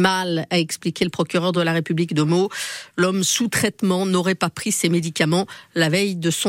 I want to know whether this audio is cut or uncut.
uncut